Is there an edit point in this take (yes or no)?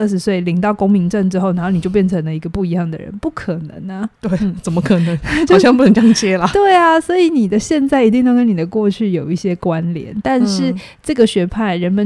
yes